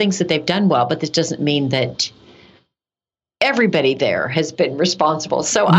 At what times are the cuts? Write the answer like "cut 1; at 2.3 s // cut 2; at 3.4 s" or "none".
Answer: none